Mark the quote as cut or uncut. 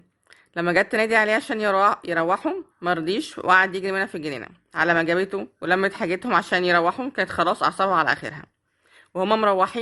cut